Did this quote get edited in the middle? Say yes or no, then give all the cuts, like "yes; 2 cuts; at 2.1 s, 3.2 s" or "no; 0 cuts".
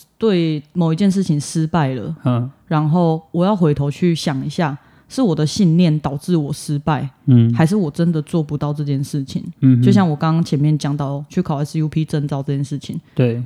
no; 0 cuts